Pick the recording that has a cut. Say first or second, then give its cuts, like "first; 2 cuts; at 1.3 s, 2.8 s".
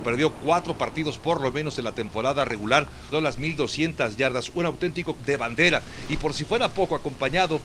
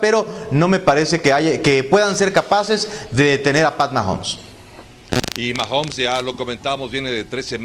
first; 2 cuts; at 3.1 s, 5.2 s